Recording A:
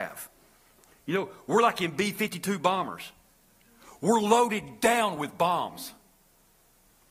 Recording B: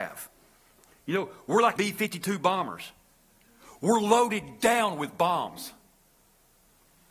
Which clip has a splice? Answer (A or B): B